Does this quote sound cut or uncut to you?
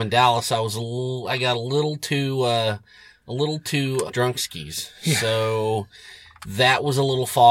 cut